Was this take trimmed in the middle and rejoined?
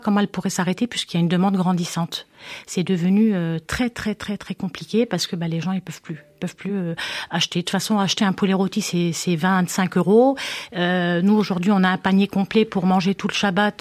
no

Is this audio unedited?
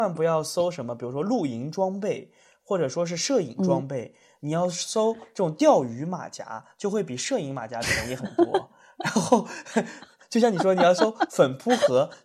yes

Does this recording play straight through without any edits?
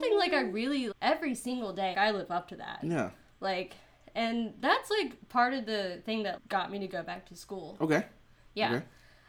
no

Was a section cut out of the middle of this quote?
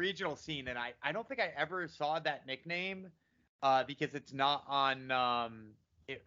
no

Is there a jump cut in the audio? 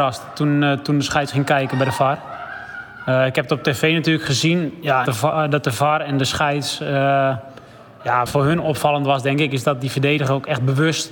yes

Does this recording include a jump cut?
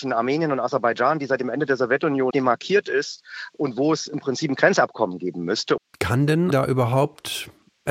yes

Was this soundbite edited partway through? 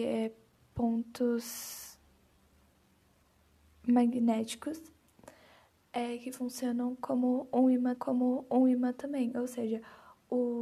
yes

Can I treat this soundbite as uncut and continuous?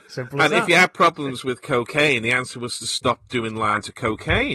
yes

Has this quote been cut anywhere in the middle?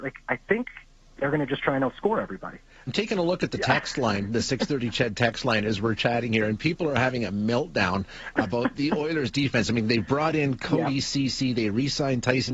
yes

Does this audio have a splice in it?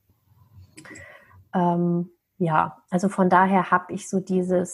no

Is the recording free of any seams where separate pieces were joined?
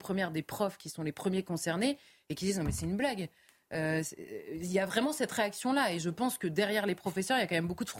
yes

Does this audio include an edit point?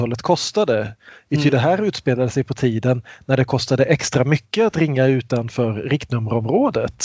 no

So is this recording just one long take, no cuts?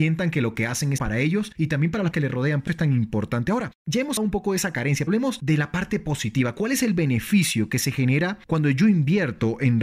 no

